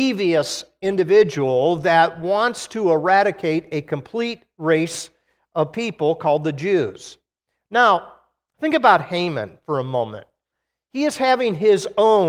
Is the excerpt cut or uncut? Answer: uncut